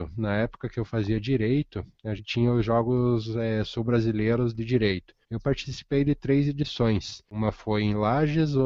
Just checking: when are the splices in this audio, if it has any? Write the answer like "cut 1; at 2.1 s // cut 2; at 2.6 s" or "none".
cut 1; at 2.2 s // cut 2; at 5.2 s